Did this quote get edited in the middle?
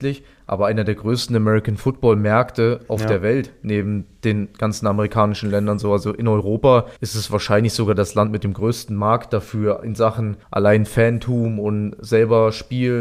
yes; 2 cuts; at 7.0 s, 10.4 s

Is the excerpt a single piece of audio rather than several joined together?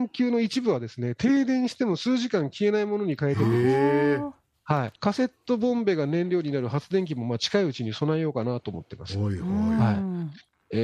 no; 1 cut; at 5.0 s

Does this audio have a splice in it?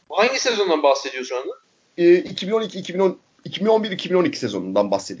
yes; 1 cut; at 1.3 s

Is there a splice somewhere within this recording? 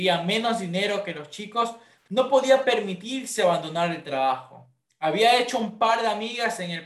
no; 0 cuts

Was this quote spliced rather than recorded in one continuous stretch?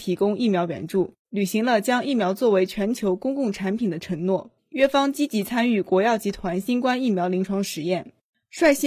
yes; 2 cuts; at 1.2 s, 4.6 s

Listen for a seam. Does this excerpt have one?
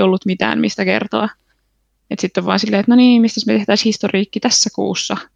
no; 0 cuts

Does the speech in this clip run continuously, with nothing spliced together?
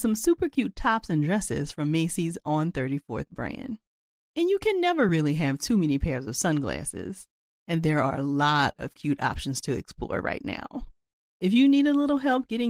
yes; 0 cuts

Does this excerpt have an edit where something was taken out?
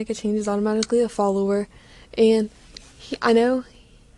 no; 0 cuts

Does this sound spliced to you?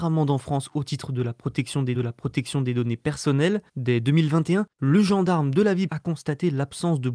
yes; 4 cuts; at 1.9 s, 3.7 s, 4.7 s, 5.9 s

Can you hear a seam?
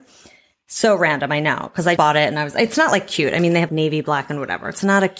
yes; 2 cuts; at 2.0 s, 3.7 s

